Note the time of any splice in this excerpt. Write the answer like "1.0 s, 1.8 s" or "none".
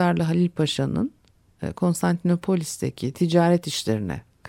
none